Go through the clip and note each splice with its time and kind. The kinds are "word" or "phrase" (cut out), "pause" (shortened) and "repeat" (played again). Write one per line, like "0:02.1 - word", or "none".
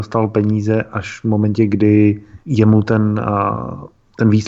0:02.4 - pause